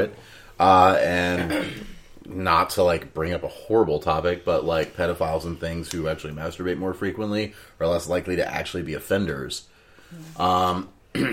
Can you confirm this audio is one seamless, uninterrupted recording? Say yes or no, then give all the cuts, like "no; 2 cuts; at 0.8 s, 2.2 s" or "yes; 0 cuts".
yes; 0 cuts